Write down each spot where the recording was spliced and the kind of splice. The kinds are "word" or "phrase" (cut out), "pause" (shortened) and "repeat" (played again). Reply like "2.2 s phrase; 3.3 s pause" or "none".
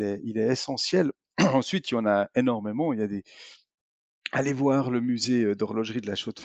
none